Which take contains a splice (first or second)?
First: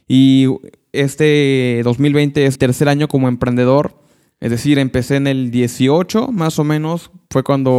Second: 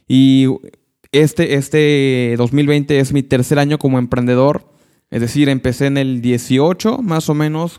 first